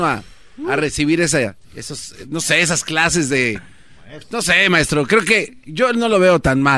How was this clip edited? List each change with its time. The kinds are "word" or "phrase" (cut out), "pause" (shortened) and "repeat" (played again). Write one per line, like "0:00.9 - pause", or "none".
0:01.6 - pause